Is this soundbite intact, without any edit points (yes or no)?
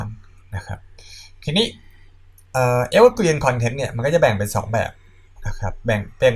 yes